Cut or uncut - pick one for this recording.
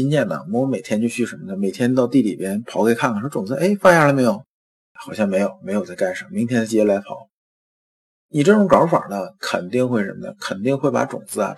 uncut